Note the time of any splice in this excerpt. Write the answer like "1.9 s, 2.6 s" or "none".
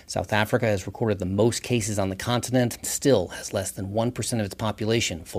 2.8 s